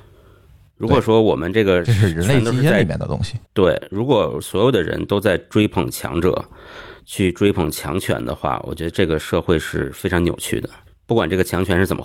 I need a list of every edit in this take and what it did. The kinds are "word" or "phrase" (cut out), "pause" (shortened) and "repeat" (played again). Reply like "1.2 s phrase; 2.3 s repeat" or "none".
3.4 s pause; 10.9 s pause